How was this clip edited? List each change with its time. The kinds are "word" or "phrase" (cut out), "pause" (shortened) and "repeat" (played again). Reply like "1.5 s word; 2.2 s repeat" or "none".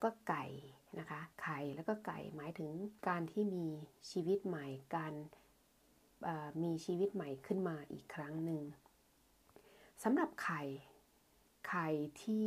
1.3 s pause; 3.0 s pause